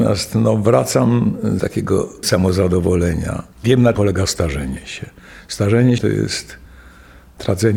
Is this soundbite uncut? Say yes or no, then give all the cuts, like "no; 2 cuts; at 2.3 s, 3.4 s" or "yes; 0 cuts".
no; 5 cuts; at 1.6 s, 2.2 s, 3.5 s, 3.9 s, 6.0 s